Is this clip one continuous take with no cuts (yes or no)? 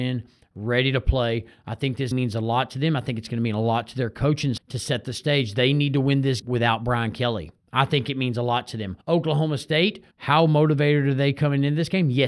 no